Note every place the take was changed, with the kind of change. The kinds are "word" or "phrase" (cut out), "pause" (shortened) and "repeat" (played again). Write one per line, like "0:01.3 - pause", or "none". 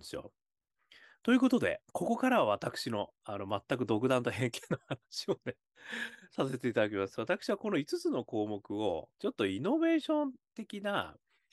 0:01.8 - pause
0:09.1 - pause